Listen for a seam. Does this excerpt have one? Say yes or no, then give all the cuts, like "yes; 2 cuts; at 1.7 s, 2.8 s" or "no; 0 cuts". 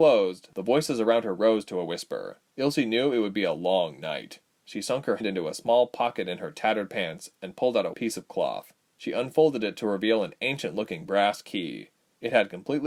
yes; 5 cuts; at 2.5 s, 4.4 s, 5.2 s, 7.9 s, 8.8 s